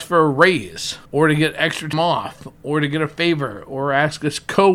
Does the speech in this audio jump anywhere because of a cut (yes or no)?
yes